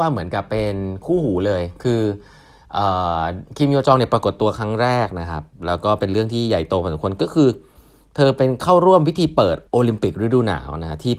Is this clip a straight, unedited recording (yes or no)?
no